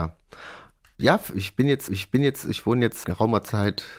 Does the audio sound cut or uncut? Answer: cut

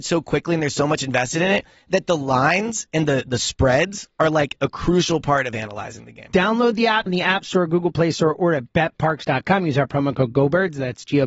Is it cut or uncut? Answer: cut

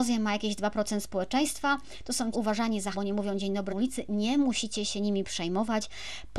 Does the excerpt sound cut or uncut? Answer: cut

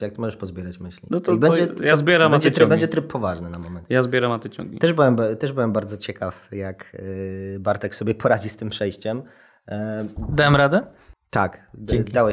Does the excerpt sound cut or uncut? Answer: uncut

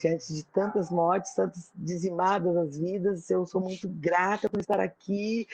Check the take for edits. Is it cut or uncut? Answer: uncut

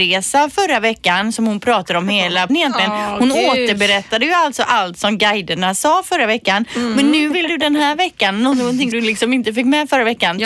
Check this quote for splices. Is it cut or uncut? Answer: cut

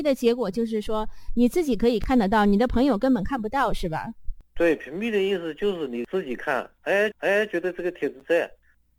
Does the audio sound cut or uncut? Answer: cut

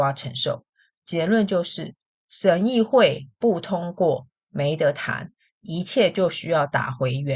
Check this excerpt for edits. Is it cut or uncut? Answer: uncut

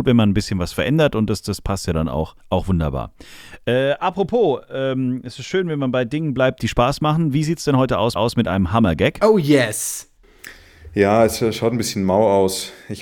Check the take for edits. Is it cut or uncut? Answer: cut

